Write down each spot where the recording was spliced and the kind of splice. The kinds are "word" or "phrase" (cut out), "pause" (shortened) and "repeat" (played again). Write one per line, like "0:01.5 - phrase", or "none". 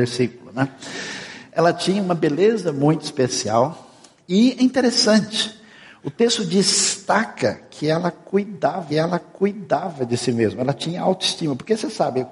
0:08.9 - repeat